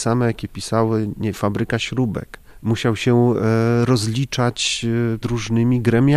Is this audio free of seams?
no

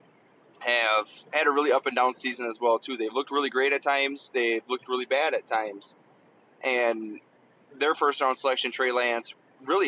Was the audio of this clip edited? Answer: no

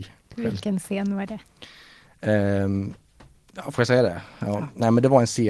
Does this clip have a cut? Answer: no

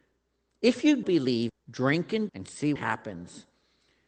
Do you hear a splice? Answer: yes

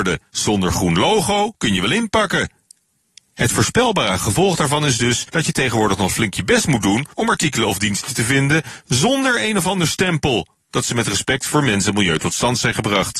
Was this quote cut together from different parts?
no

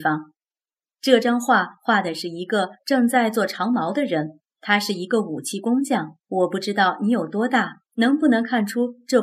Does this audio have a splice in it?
yes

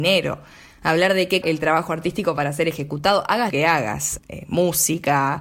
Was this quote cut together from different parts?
yes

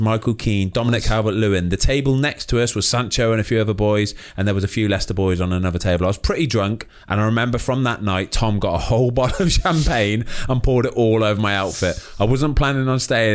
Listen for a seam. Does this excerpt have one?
no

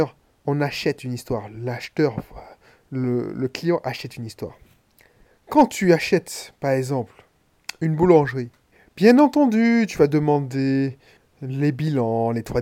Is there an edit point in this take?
no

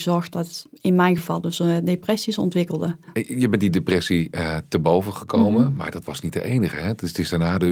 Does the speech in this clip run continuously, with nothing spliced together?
yes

